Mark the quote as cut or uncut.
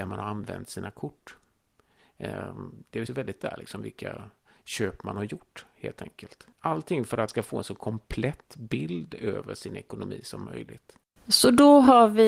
cut